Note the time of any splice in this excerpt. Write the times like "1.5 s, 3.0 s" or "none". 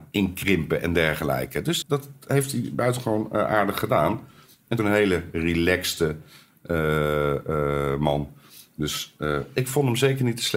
1.8 s, 4.8 s